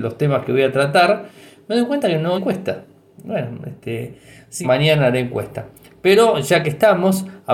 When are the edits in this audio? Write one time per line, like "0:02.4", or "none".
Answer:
0:02.3
0:04.6